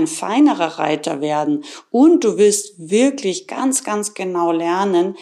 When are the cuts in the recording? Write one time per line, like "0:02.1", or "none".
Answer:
none